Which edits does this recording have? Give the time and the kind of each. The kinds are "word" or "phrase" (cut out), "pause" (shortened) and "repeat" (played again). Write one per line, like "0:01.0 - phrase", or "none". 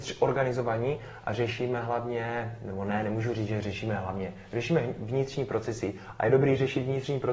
none